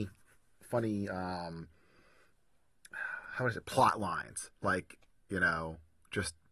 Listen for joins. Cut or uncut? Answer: uncut